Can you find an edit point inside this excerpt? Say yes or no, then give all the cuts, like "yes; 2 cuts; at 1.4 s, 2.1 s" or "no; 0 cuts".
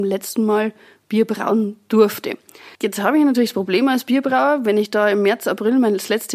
yes; 1 cut; at 2.7 s